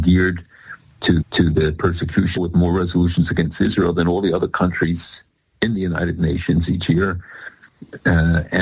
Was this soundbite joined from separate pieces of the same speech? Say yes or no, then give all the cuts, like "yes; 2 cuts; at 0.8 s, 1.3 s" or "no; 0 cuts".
yes; 2 cuts; at 1.2 s, 2.4 s